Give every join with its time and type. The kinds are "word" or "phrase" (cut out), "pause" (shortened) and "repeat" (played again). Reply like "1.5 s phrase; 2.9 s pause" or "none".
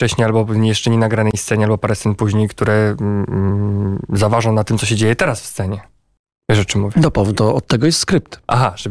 none

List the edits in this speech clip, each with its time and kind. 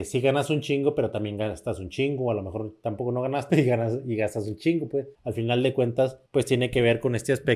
3.5 s word; 5.1 s pause; 6.3 s pause

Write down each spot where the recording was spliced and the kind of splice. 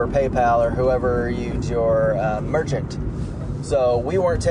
1.6 s phrase

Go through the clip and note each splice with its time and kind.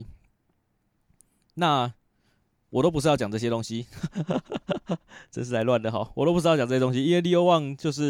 none

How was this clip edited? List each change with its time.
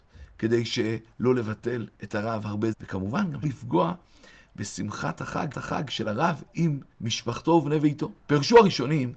1.9 s pause; 2.7 s phrase; 3.4 s word; 5.5 s repeat; 6.9 s pause; 8.2 s pause

